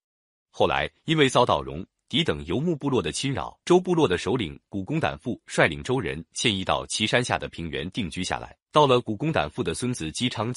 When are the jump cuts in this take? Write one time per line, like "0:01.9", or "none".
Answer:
0:03.6
0:08.6